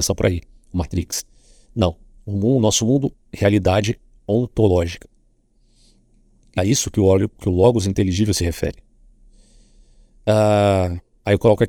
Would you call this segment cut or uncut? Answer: cut